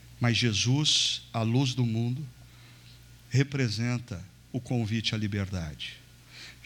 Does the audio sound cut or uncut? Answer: uncut